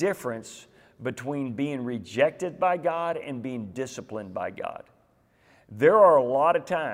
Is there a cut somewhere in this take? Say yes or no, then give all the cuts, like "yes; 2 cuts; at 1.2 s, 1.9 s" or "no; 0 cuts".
no; 0 cuts